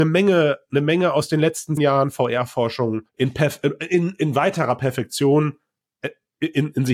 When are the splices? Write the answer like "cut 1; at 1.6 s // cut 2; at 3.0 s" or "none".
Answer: cut 1; at 1.8 s // cut 2; at 3.1 s